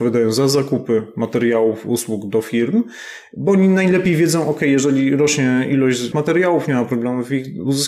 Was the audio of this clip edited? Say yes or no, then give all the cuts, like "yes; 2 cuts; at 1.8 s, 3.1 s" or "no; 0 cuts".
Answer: yes; 1 cut; at 6.1 s